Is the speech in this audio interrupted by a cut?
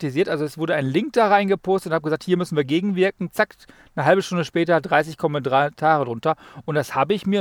no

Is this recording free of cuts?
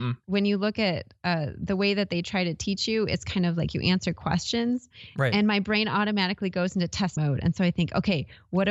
no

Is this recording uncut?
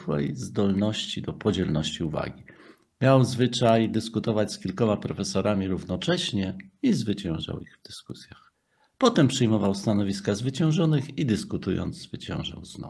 yes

